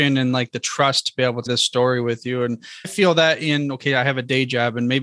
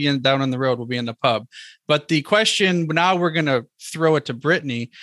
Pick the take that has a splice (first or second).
first